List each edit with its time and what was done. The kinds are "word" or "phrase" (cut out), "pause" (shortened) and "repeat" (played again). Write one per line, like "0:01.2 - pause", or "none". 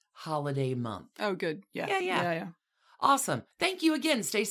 0:02.0 - word
0:03.5 - pause